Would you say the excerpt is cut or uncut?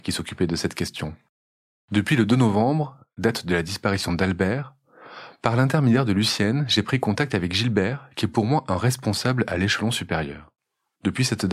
uncut